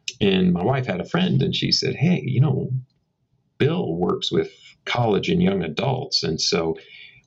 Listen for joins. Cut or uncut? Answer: uncut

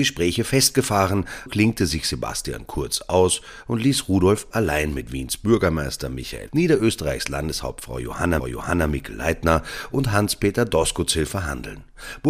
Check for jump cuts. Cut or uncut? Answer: cut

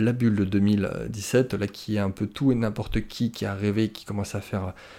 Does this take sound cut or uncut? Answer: uncut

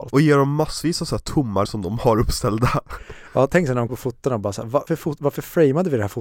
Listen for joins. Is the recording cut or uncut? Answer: cut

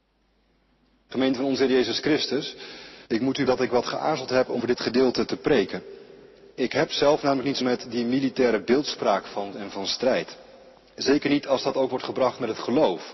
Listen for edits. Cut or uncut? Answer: cut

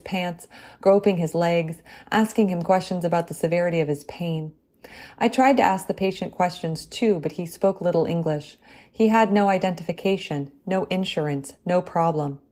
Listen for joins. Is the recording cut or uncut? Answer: uncut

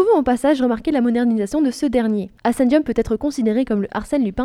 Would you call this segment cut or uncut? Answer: cut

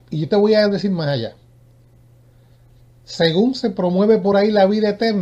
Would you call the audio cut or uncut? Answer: uncut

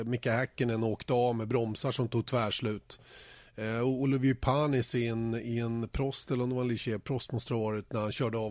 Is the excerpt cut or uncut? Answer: uncut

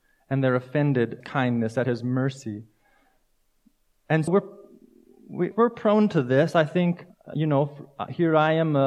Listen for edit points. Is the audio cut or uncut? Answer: cut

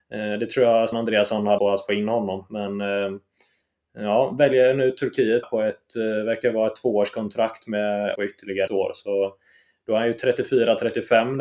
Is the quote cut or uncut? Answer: cut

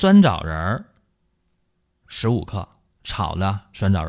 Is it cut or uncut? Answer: uncut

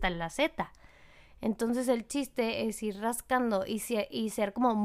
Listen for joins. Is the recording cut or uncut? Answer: uncut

